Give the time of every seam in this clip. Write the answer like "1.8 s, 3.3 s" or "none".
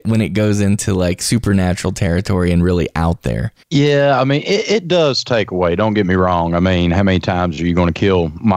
3.6 s

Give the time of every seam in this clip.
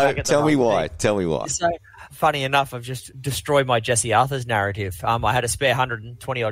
2.1 s, 3.1 s

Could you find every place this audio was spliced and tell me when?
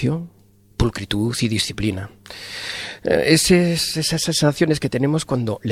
none

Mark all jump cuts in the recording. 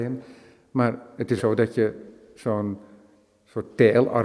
1.4 s

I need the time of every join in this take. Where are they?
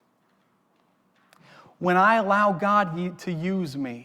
none

